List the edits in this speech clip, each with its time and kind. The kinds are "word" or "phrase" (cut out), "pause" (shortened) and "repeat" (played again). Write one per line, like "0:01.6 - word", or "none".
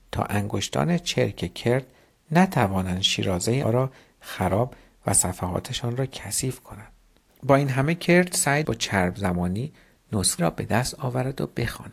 0:03.6 - word
0:08.6 - word
0:10.4 - word